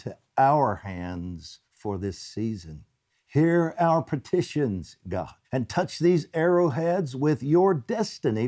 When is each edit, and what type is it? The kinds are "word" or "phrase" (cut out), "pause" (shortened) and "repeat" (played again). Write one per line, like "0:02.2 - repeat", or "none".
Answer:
0:01.6 - pause
0:03.1 - pause
0:05.4 - pause